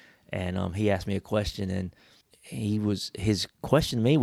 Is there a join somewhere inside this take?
yes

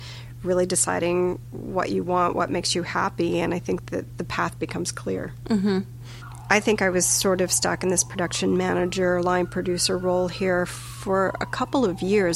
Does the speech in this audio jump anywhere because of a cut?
yes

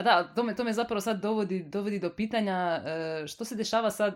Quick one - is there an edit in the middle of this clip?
no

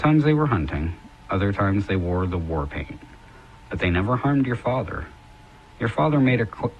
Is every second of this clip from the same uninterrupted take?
yes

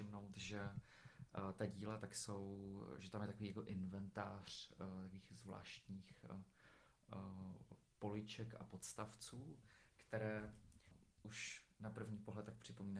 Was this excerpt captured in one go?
yes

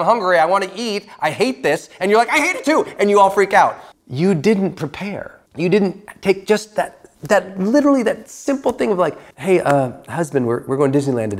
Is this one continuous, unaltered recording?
no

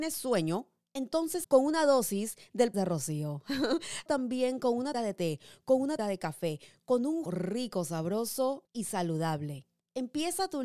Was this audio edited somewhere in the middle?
yes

